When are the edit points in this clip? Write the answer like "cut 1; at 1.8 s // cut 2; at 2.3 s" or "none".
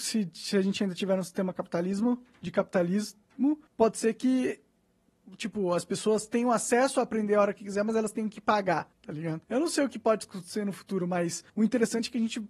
cut 1; at 3.7 s // cut 2; at 8.9 s // cut 3; at 9.4 s // cut 4; at 11.5 s